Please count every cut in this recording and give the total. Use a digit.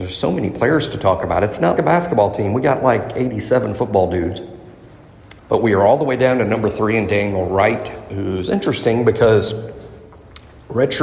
2